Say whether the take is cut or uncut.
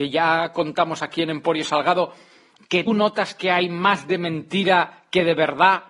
cut